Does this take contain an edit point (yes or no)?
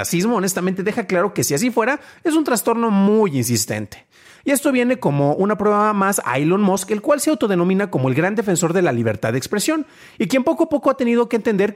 no